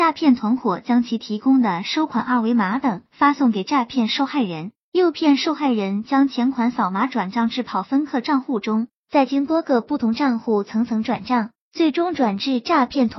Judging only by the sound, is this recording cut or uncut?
cut